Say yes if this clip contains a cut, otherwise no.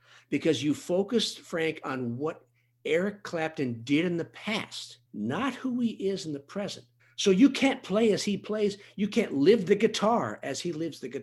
yes